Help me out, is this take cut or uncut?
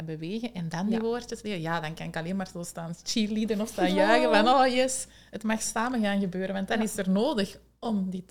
uncut